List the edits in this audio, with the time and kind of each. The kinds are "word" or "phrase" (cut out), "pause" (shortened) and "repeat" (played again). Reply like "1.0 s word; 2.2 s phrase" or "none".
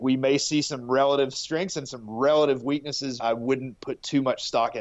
3.2 s word